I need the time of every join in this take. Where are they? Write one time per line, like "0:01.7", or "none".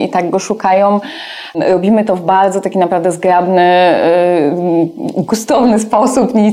none